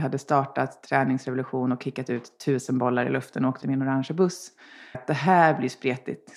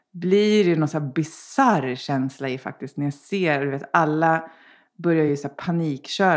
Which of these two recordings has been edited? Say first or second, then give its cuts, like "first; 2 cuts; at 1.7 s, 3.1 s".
first; 2 cuts; at 3.6 s, 4.9 s